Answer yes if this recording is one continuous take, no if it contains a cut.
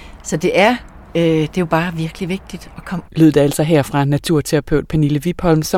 no